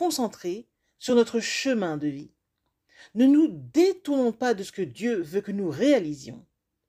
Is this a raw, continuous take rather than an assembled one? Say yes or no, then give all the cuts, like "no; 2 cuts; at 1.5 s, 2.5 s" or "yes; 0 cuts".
yes; 0 cuts